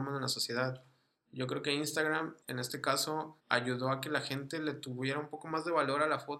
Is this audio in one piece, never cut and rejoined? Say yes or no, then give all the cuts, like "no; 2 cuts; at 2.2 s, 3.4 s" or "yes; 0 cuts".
no; 2 cuts; at 2.4 s, 3.4 s